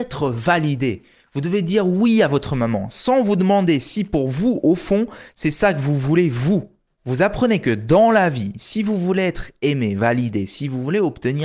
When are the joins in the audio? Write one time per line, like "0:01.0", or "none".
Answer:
none

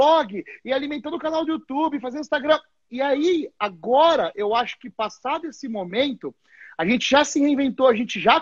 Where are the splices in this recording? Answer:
none

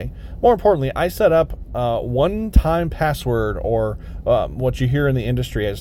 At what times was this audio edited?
none

